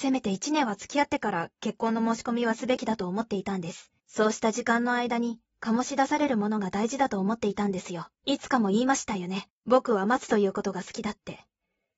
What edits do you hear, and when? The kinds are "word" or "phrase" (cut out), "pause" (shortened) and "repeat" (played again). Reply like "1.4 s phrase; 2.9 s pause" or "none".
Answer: 4.0 s pause; 8.1 s pause; 9.6 s pause